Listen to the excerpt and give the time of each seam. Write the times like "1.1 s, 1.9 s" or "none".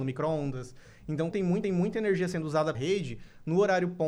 1.3 s, 1.6 s, 2.7 s

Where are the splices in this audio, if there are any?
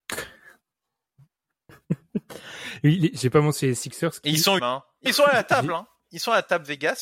4.6 s, 5.1 s

